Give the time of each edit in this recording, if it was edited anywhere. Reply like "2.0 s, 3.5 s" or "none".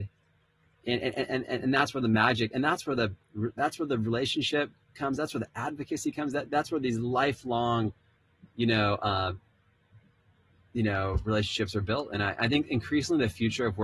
none